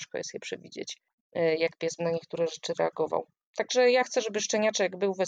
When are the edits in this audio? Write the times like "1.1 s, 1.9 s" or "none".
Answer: 2.0 s